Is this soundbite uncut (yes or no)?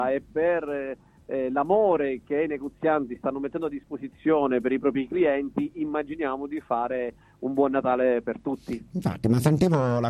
yes